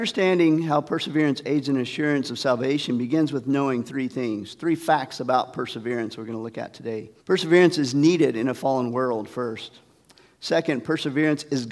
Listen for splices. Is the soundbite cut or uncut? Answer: cut